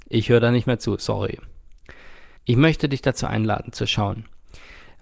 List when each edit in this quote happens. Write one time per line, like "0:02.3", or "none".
0:02.4